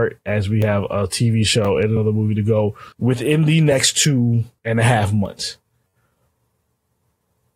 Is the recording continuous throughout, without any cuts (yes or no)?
no